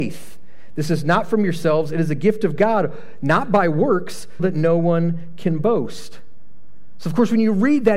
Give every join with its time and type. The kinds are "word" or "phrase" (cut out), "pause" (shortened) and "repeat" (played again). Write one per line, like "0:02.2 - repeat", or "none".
0:04.4 - word

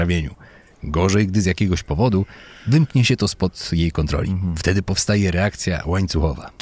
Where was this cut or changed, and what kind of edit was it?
none

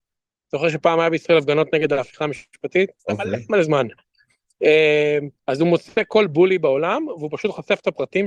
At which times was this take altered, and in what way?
0:03.0 - pause
0:05.4 - pause

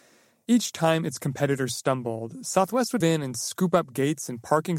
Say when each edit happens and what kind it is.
0:03.0 - word

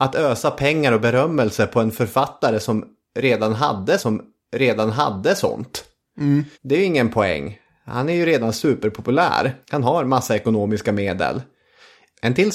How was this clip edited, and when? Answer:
0:04.0 - repeat
0:06.5 - pause
0:09.6 - pause

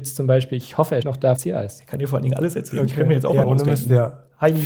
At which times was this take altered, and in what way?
0:01.0 - word
0:01.4 - word
0:03.4 - phrase

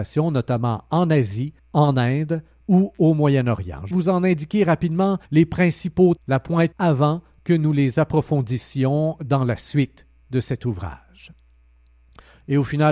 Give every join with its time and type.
0:01.6 - pause
0:03.9 - word
0:05.2 - pause
0:06.2 - word
0:06.7 - word

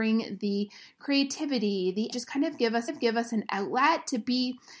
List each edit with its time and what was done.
0:02.1 - phrase
0:02.9 - repeat

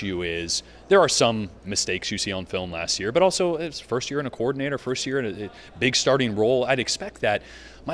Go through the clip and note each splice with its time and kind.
none

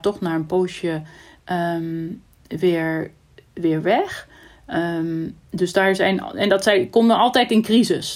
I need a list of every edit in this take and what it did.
none

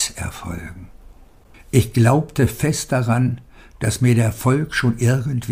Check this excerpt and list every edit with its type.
0:01.5 - pause

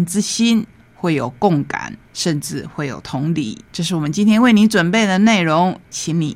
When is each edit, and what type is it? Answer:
0:02.0 - pause
0:03.7 - pause

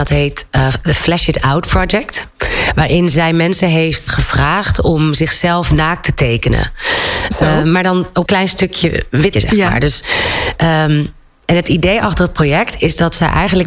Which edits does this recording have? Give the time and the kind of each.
0:04.1 - word
0:08.3 - word
0:09.3 - word

